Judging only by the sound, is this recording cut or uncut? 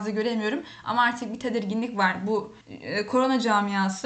cut